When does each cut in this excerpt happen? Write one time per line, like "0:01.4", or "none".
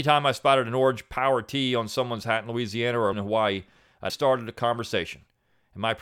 0:03.1
0:04.1